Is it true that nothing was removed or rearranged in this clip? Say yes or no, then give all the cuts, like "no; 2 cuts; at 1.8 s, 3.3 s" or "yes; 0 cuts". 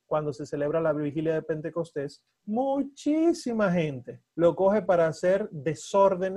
no; 2 cuts; at 2.3 s, 4.3 s